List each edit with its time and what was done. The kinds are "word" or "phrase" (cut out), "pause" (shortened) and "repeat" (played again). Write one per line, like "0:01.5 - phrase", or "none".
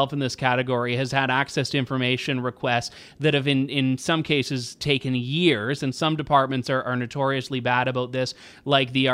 none